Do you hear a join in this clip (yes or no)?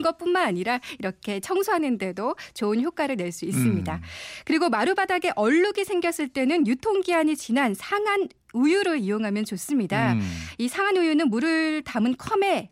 no